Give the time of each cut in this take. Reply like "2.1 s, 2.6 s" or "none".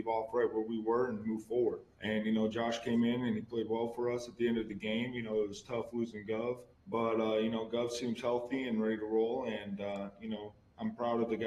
1.9 s, 6.7 s